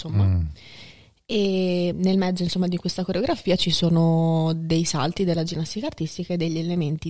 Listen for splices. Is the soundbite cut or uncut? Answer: cut